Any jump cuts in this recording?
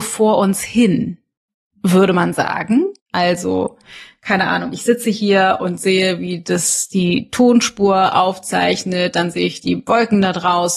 yes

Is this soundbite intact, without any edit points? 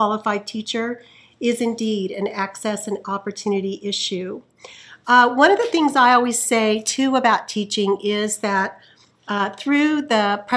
yes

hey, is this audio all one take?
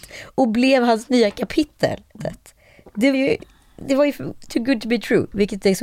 no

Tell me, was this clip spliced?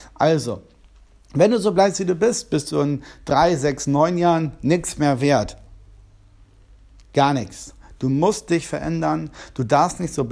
no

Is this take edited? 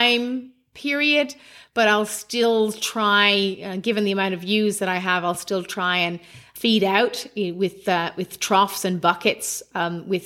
no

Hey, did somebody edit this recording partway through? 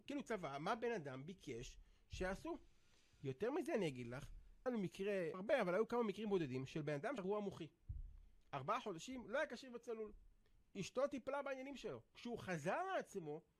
yes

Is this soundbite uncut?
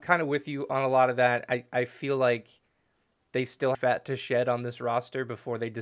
no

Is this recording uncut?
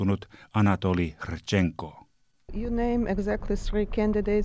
yes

